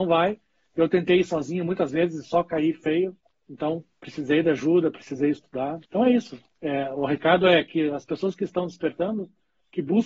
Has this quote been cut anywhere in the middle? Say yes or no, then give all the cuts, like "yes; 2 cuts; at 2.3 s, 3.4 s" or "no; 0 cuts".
yes; 2 cuts; at 3.3 s, 5.9 s